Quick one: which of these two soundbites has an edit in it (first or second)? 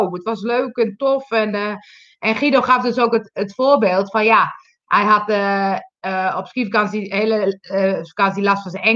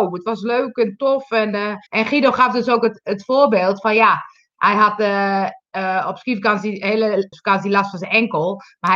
second